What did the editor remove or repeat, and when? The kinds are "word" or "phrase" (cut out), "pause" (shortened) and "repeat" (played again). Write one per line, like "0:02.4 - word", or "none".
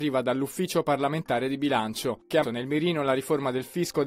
0:02.4 - word